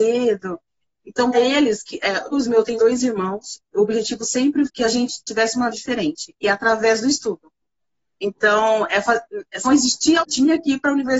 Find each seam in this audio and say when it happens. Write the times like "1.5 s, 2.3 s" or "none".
1.3 s, 2.3 s, 2.8 s, 4.7 s, 5.7 s, 9.6 s, 10.2 s